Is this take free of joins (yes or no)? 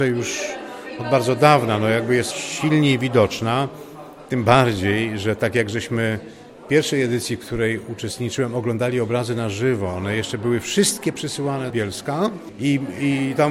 no